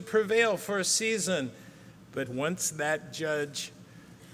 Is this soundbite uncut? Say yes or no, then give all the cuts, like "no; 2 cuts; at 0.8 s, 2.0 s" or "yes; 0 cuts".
no; 1 cut; at 2.3 s